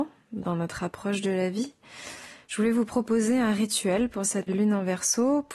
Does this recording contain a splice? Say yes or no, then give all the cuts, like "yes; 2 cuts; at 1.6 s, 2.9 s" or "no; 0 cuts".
yes; 1 cut; at 4.5 s